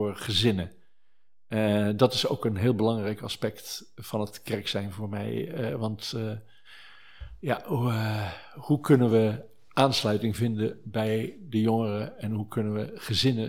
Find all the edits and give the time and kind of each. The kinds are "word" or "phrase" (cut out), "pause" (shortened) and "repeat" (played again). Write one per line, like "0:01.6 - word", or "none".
none